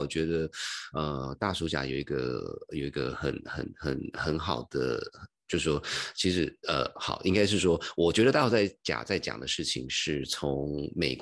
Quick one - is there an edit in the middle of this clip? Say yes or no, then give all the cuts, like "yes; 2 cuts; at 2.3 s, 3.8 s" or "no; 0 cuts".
no; 0 cuts